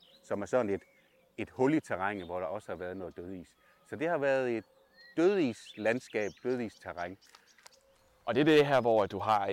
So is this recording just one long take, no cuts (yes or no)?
yes